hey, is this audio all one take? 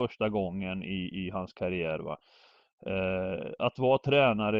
yes; 0 cuts

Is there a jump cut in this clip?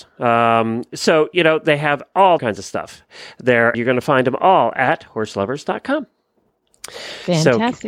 yes; 2 cuts; at 2.4 s, 3.7 s

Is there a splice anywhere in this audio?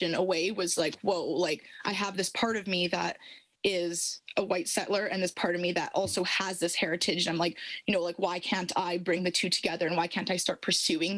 no; 0 cuts

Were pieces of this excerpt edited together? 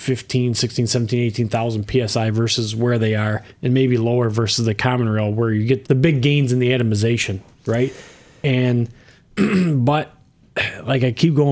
yes; 1 cut; at 5.8 s

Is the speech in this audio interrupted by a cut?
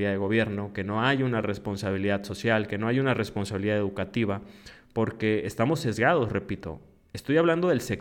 no; 0 cuts

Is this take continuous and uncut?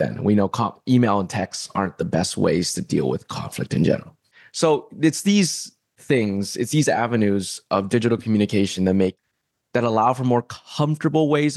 yes; 0 cuts

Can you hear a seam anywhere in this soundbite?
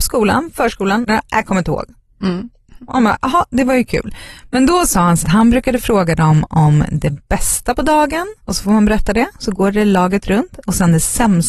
yes; 3 cuts; at 1.1 s, 5.2 s, 8.4 s

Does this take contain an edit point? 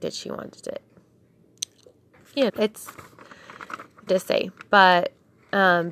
yes; 2 cuts; at 2.5 s, 4.1 s

